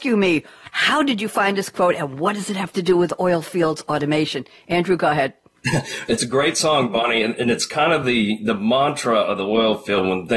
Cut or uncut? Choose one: uncut